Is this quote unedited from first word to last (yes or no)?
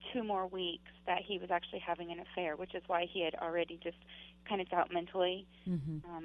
no